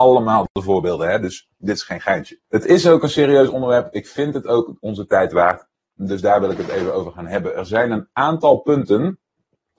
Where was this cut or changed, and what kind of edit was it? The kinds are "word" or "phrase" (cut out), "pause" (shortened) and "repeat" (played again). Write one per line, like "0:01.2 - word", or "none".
0:01.5 - pause
0:02.4 - pause